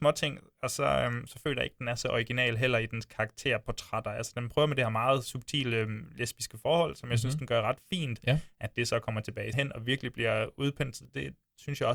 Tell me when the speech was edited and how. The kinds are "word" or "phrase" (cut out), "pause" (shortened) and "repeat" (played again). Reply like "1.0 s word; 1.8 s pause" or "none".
9.5 s word